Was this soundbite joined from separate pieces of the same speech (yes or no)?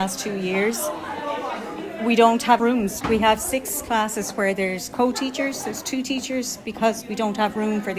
yes